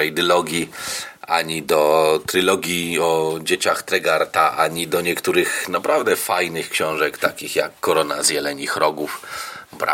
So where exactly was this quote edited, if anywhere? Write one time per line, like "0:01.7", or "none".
none